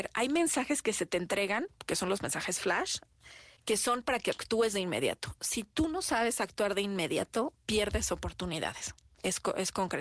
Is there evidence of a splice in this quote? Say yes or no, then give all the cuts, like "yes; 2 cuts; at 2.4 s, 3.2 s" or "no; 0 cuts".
no; 0 cuts